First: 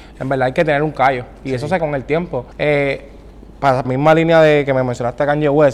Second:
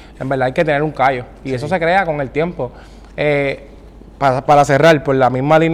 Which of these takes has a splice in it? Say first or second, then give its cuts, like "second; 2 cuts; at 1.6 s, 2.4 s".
first; 3 cuts; at 1.8 s, 2.5 s, 3.8 s